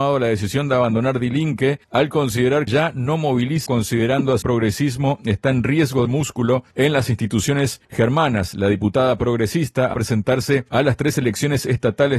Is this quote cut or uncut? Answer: cut